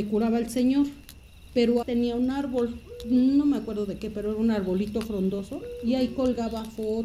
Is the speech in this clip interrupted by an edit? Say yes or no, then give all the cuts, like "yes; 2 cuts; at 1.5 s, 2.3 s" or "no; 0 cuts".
yes; 1 cut; at 1.8 s